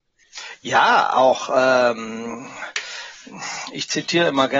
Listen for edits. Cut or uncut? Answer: uncut